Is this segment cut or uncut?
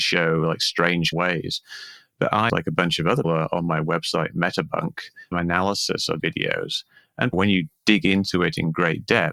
cut